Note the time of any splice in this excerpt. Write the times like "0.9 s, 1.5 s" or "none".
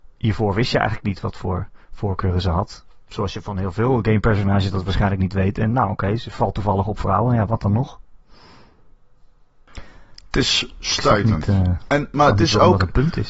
none